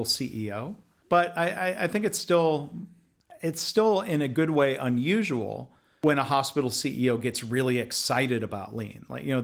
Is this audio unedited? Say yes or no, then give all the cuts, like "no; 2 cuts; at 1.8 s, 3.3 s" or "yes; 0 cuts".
yes; 0 cuts